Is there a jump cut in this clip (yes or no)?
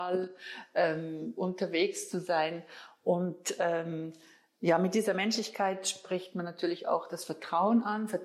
no